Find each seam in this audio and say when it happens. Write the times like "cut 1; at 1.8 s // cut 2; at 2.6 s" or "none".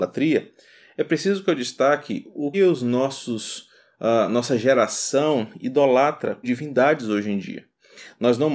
cut 1; at 2.5 s // cut 2; at 6.4 s